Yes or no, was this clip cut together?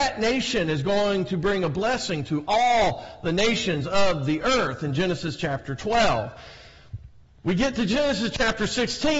no